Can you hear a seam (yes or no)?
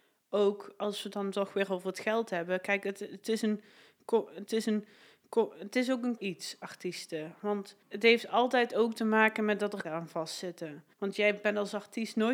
yes